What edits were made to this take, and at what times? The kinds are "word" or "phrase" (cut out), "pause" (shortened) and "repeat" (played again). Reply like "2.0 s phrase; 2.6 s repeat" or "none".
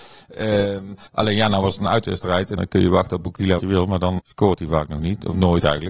1.1 s pause; 2.6 s word; 3.6 s word; 4.2 s word